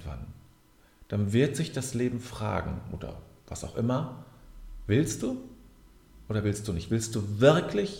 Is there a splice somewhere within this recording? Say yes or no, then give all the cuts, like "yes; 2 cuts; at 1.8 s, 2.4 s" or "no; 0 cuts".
no; 0 cuts